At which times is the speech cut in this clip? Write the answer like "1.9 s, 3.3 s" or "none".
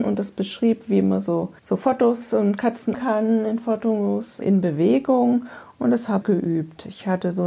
1.6 s, 2.9 s, 4.4 s, 6.2 s

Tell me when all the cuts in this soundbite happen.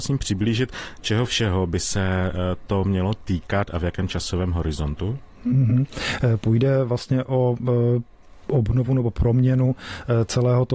none

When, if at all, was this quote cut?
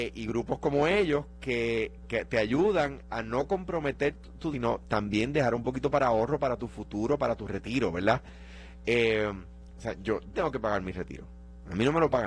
2.0 s, 4.5 s, 10.3 s

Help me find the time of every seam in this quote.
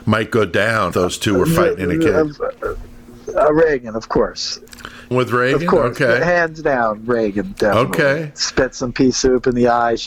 0.9 s, 5.1 s

